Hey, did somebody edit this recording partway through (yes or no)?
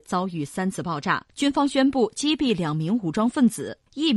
yes